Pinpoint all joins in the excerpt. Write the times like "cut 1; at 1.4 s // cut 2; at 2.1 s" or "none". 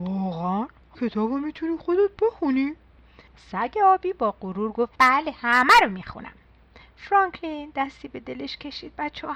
cut 1; at 0.9 s // cut 2; at 3.3 s // cut 3; at 5.0 s